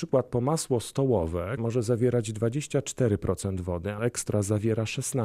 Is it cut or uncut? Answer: cut